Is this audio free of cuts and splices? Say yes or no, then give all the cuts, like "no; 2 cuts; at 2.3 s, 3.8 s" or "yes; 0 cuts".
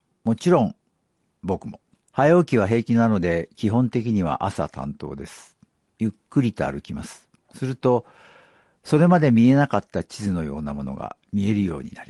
no; 1 cut; at 1.9 s